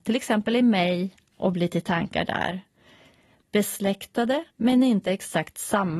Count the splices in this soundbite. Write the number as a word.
one